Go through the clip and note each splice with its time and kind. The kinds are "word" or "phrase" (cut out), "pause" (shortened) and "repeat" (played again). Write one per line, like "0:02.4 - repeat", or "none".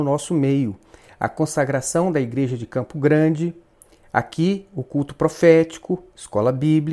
none